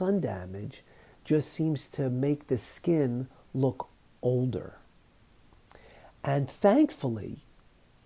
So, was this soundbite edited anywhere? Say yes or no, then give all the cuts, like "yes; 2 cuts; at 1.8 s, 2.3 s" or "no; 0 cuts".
no; 0 cuts